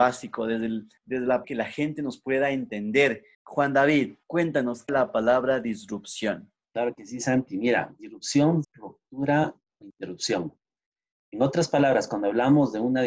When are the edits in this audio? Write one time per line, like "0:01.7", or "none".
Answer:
0:01.0
0:01.4
0:03.3
0:04.2
0:04.9
0:06.6
0:08.6